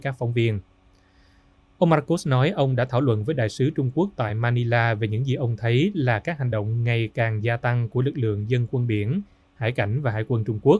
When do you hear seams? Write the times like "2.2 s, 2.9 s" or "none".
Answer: none